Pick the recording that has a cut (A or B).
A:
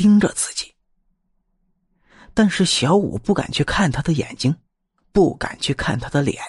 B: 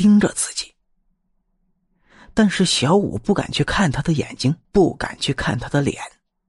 B